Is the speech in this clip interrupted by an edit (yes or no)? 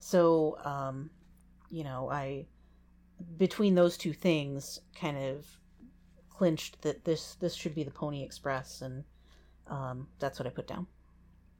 no